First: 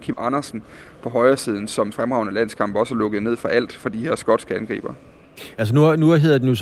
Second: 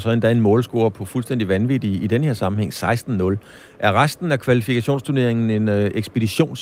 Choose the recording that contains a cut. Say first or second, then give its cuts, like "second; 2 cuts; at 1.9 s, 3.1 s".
first; 1 cut; at 1.9 s